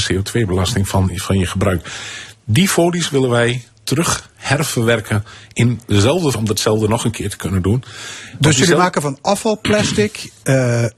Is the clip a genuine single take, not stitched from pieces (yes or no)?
no